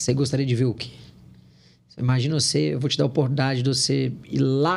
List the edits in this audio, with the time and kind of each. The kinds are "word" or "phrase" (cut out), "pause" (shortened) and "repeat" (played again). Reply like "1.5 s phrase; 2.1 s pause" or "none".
none